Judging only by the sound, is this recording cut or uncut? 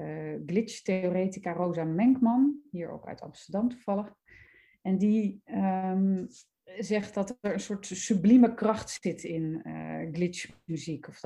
uncut